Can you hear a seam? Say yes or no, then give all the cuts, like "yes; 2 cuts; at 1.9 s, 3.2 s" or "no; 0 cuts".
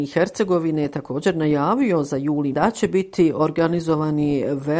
yes; 1 cut; at 2.5 s